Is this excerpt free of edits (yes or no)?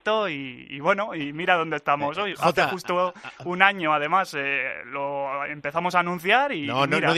yes